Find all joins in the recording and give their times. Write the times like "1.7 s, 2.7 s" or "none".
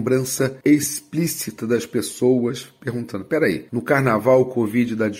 none